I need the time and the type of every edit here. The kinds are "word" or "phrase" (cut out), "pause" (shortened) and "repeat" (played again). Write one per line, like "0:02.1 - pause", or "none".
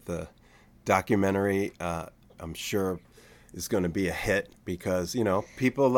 none